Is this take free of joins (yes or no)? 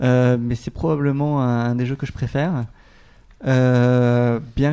yes